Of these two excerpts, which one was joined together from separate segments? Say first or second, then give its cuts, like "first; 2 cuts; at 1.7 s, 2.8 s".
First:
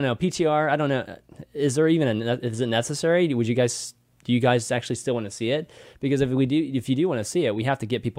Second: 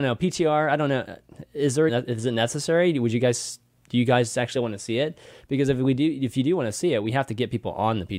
second; 2 cuts; at 1.9 s, 4.5 s